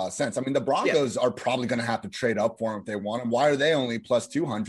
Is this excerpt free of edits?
yes; 0 cuts

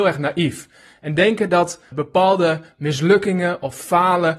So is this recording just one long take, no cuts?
no; 1 cut; at 1.9 s

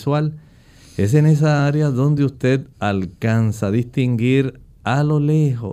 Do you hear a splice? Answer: no; 0 cuts

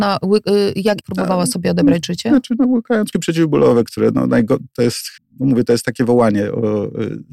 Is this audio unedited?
no; 3 cuts; at 1.0 s, 3.1 s, 5.2 s

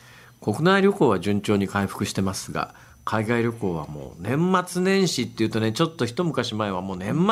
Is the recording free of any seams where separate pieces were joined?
yes; 0 cuts

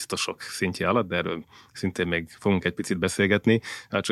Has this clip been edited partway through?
no; 0 cuts

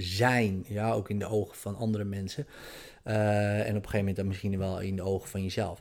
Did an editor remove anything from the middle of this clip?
no; 0 cuts

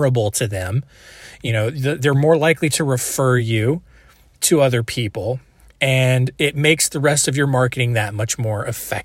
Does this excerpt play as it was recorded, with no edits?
yes; 0 cuts

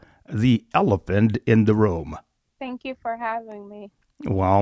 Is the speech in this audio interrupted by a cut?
yes; 1 cut; at 2.4 s

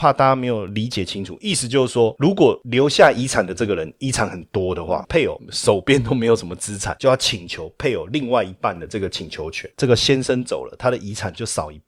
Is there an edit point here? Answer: yes; 1 cut; at 5.0 s

